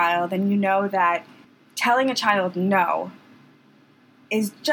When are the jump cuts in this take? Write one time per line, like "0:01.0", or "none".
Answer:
0:01.4